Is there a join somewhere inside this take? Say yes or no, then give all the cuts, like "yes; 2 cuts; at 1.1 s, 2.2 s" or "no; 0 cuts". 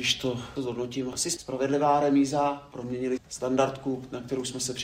yes; 1 cut; at 3.2 s